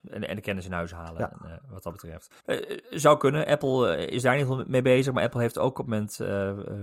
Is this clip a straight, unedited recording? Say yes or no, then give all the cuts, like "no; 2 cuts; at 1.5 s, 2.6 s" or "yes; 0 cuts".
no; 2 cuts; at 2.4 s, 5.9 s